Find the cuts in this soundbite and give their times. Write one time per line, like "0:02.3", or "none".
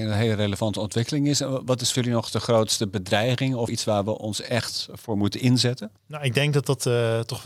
0:01.9
0:03.7
0:06.0

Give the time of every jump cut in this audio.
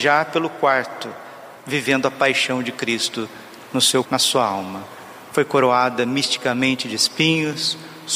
0:01.6
0:04.0

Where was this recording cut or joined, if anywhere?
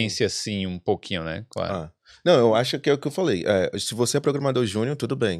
none

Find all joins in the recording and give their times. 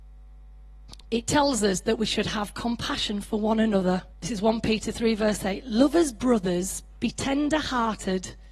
0:01.0
0:04.1

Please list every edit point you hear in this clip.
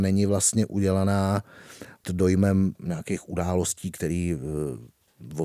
0:02.0
0:02.8

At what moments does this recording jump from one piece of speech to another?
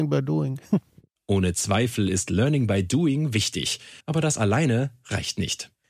0:04.0

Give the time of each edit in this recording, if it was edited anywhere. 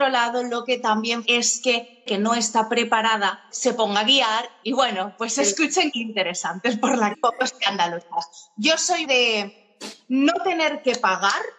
0:01.2
0:02.1
0:03.5
0:04.6
0:05.9
0:07.1
0:09.0

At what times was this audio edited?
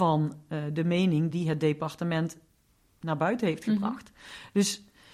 none

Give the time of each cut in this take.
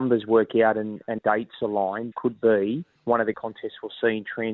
0:01.2
0:02.1
0:03.0
0:03.3

